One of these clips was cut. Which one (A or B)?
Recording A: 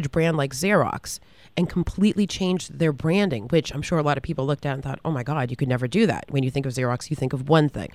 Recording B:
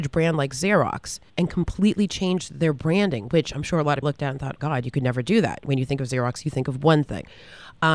B